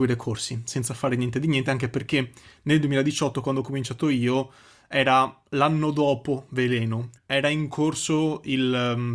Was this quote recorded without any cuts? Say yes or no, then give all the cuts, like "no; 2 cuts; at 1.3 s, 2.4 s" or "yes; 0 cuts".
no; 1 cut; at 7.2 s